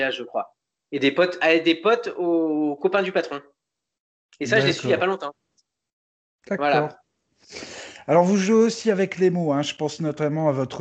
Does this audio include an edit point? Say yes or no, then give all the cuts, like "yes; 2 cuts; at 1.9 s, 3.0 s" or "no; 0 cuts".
no; 0 cuts